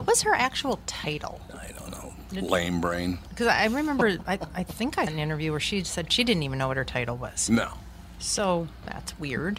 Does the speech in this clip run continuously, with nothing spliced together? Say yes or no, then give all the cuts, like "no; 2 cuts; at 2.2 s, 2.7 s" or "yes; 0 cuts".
no; 1 cut; at 5.1 s